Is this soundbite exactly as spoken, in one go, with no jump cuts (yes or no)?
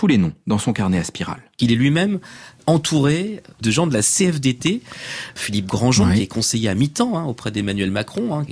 yes